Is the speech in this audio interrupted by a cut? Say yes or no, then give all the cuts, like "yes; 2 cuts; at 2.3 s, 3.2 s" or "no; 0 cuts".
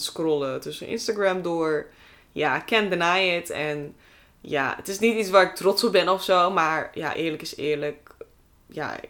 no; 0 cuts